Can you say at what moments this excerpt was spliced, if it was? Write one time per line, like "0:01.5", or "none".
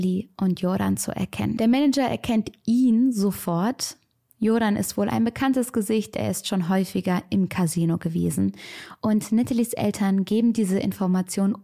none